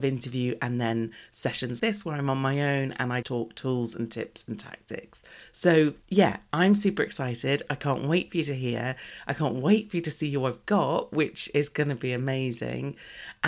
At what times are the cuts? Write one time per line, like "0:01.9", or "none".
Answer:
0:01.8
0:03.2
0:06.0